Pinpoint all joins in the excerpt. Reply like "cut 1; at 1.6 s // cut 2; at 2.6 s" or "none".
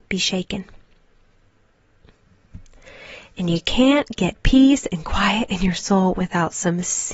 none